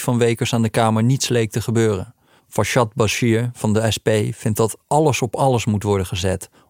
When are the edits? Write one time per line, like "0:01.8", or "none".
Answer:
0:02.4
0:04.8

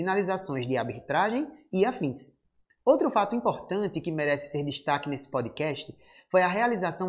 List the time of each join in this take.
none

